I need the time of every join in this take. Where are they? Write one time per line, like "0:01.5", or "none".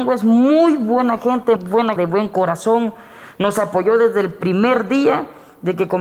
0:01.6
0:02.0